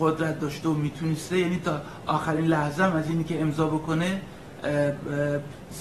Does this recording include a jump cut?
no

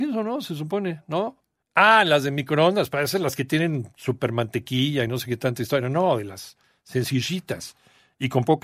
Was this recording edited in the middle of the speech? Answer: no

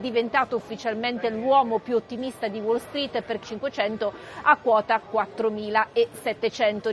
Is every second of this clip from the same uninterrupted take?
no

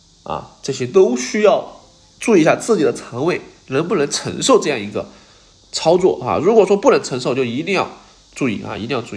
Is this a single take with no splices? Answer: yes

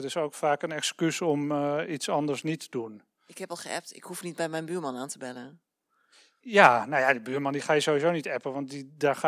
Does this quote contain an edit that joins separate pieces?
no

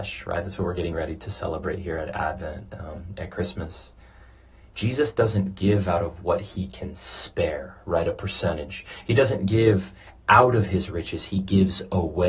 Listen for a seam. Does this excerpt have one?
no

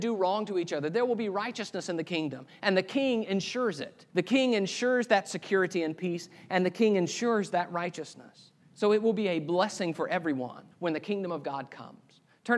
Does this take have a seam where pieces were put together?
yes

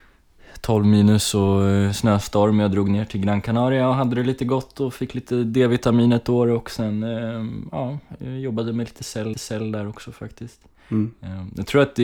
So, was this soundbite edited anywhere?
yes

